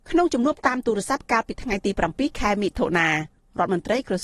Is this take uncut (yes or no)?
yes